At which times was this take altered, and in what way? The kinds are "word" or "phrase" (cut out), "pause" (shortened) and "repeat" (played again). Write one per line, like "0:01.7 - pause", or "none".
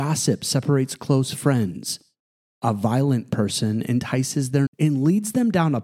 0:04.7 - word